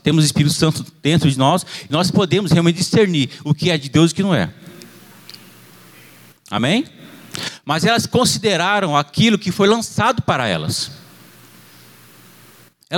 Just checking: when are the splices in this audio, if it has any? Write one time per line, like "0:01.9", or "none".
none